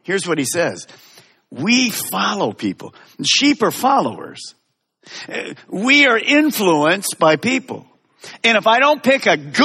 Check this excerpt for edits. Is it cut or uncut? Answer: uncut